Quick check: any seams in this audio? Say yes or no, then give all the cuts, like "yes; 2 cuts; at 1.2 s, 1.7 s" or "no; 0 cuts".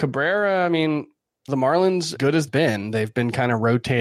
yes; 3 cuts; at 1.5 s, 2.2 s, 2.5 s